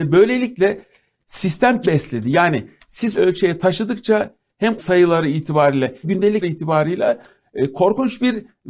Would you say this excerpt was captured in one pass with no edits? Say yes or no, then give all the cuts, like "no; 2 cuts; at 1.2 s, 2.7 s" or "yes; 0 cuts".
no; 5 cuts; at 1.8 s, 3.1 s, 4.8 s, 6.0 s, 6.4 s